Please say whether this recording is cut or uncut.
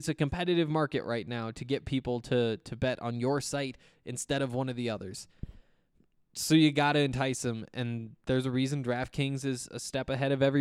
uncut